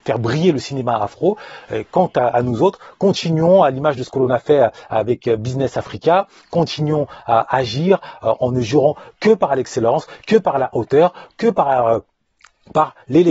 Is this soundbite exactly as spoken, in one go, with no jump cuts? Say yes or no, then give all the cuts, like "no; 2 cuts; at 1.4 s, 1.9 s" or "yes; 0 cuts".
yes; 0 cuts